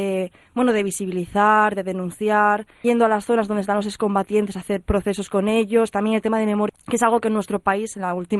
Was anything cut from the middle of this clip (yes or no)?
yes